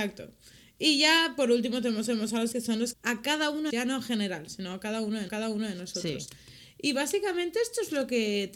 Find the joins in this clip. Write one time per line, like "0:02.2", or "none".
0:02.1
0:02.5
0:02.9
0:03.7
0:05.3